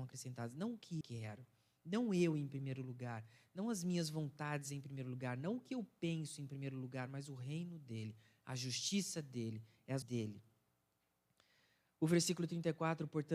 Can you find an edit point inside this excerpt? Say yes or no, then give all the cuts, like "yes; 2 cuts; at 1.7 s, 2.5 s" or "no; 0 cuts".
yes; 2 cuts; at 1.0 s, 10.0 s